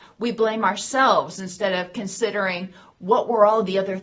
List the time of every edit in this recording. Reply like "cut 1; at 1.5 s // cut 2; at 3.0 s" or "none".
none

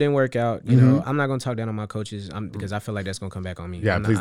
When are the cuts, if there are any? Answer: cut 1; at 1.0 s

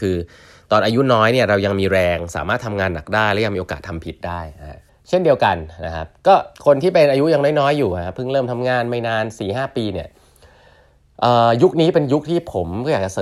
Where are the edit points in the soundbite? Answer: cut 1; at 4.9 s // cut 2; at 6.5 s

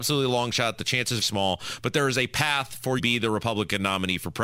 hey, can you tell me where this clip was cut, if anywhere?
cut 1; at 1.2 s // cut 2; at 3.0 s

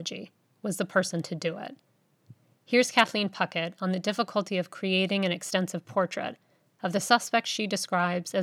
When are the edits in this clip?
none

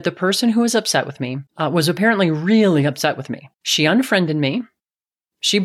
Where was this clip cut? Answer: cut 1; at 1.5 s // cut 2; at 3.5 s

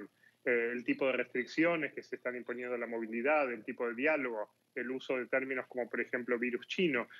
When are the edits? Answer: none

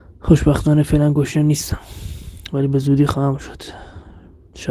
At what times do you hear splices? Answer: none

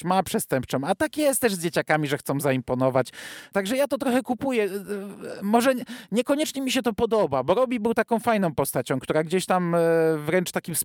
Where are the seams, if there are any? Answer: none

